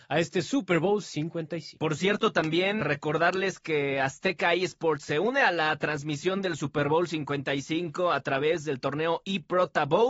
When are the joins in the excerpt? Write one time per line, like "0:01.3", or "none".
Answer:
0:02.8